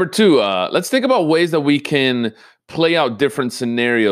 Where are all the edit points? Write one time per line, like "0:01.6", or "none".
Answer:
none